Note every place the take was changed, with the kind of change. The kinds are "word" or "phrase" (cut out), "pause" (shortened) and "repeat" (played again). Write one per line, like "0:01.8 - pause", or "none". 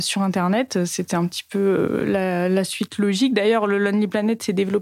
none

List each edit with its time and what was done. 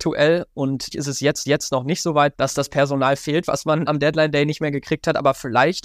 0:00.9 - word
0:01.4 - repeat
0:02.3 - word
0:03.8 - word

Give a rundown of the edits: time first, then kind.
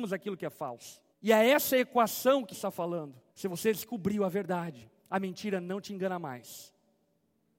0:01.1 - pause
0:02.5 - word
0:03.3 - pause
0:05.0 - pause

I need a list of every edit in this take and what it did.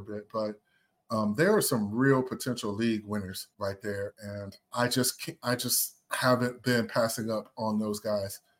0:03.5 - pause

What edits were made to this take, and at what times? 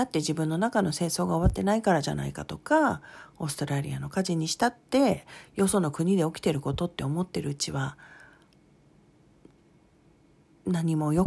none

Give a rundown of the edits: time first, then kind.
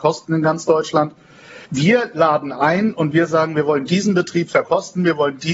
0:01.7 - pause

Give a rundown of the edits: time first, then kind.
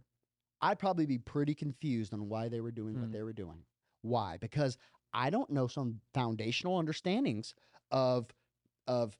none

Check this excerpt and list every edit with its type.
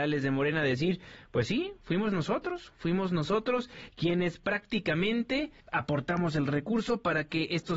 0:05.6 - pause

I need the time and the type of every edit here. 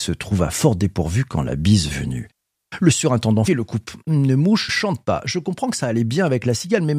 0:01.9 - word
0:03.5 - word
0:04.7 - word

